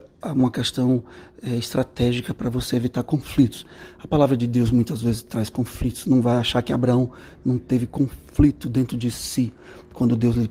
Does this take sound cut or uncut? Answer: uncut